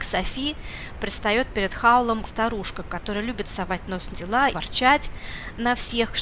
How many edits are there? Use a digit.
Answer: 3